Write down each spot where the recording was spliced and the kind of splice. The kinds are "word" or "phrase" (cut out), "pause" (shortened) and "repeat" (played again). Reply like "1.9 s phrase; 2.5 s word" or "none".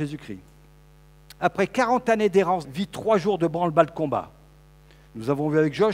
2.6 s phrase